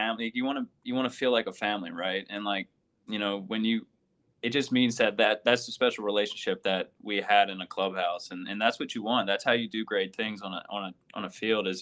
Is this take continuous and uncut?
yes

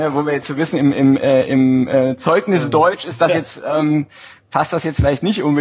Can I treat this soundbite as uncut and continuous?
yes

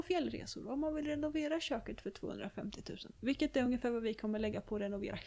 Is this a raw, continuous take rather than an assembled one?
yes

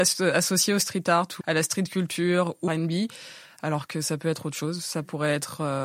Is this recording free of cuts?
no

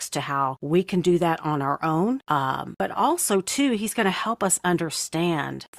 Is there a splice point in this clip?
no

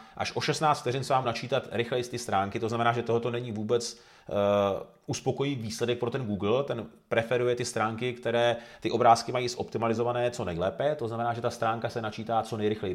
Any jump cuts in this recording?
yes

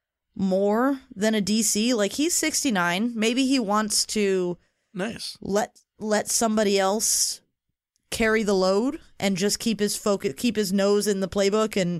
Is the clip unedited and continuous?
yes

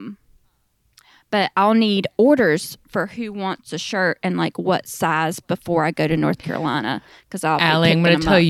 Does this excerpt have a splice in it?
no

